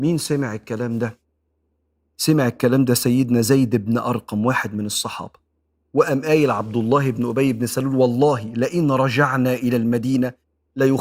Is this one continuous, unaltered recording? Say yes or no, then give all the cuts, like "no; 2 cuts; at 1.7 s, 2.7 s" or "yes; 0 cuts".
yes; 0 cuts